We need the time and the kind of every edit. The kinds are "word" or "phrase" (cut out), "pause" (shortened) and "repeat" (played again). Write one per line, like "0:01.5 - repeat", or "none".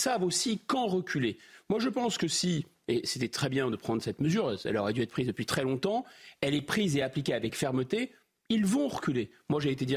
none

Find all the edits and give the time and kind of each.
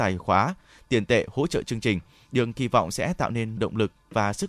0:03.6 - word

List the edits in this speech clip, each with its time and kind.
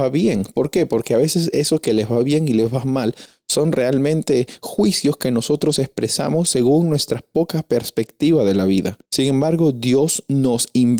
0:09.1 - pause

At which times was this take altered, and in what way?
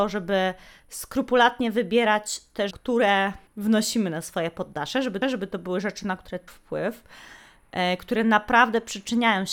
0:02.7 - word
0:03.5 - pause
0:05.2 - repeat
0:06.5 - word

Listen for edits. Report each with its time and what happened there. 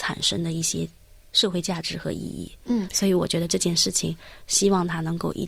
none

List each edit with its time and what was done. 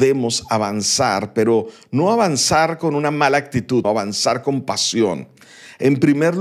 0:03.8 - word

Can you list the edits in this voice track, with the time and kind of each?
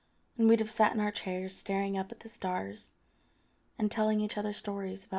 none

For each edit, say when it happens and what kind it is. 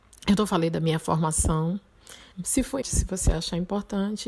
0:02.3 - pause
0:02.8 - word

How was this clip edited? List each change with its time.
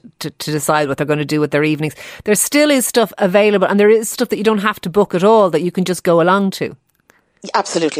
0:04.1 - word

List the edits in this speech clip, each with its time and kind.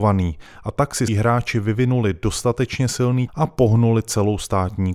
0:01.1 - phrase
0:03.3 - word

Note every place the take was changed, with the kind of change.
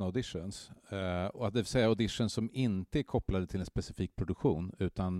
none

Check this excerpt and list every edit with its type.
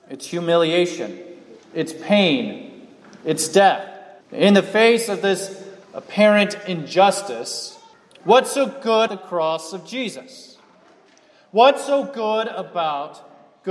0:01.6 - pause
0:04.2 - pause
0:05.8 - pause
0:07.9 - pause
0:09.1 - word

